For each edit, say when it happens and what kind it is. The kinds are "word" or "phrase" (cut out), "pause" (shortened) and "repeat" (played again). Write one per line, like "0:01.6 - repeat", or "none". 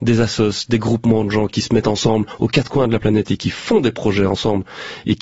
none